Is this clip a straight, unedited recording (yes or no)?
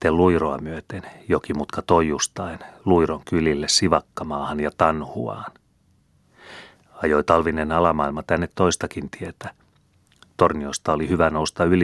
yes